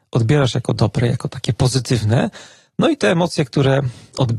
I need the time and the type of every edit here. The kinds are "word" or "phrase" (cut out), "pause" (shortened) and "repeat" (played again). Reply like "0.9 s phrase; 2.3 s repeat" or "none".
none